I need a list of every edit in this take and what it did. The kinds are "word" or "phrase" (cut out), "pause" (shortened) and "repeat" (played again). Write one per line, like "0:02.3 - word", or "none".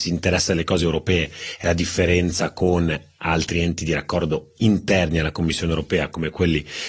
none